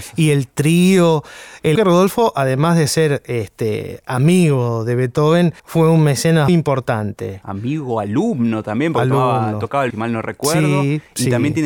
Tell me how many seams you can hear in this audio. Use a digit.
4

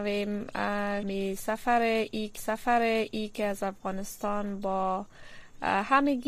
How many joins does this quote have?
2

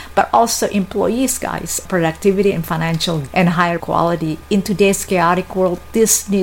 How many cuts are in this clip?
3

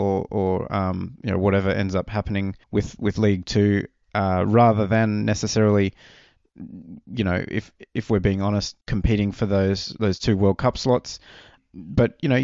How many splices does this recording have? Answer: 2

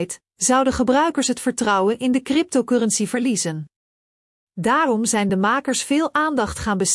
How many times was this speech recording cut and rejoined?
0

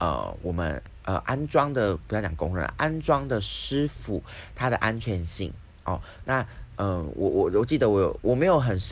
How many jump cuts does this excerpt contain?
0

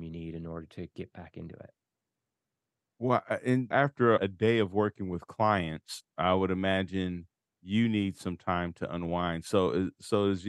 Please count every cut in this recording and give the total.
2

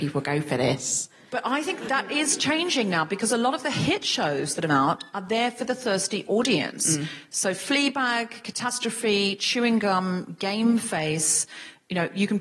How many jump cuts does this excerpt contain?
2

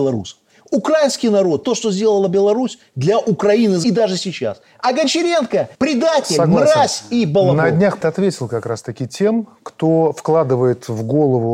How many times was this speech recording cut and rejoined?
4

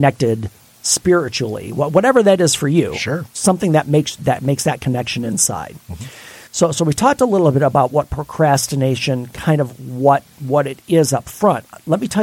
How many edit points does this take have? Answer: 2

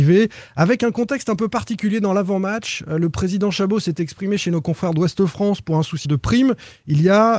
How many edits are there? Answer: 1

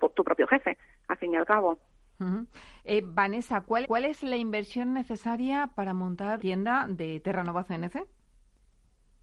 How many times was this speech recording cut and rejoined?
2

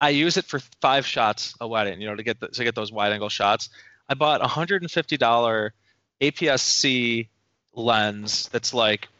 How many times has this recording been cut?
0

